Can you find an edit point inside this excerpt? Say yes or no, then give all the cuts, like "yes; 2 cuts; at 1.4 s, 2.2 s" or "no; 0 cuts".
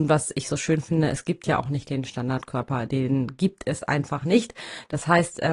no; 0 cuts